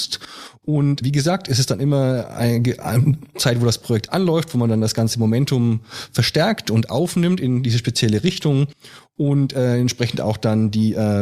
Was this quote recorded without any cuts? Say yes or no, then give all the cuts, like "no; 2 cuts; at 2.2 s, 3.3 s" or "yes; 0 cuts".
no; 1 cut; at 1.0 s